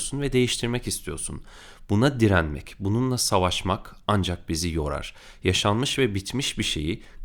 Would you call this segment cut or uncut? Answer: uncut